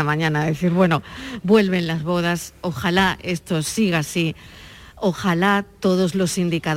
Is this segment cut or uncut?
uncut